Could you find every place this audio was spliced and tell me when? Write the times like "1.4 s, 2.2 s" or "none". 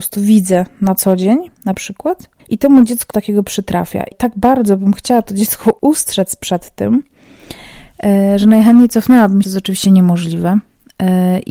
2.4 s, 3.1 s, 4.1 s, 9.4 s